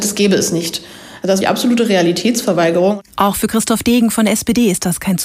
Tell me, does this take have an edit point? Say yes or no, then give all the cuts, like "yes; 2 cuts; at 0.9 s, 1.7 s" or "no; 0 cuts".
yes; 1 cut; at 1.4 s